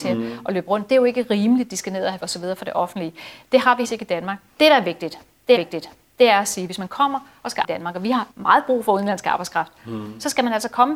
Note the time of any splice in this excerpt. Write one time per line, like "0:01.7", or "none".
0:02.2
0:03.8
0:04.5
0:05.6
0:07.6
0:08.3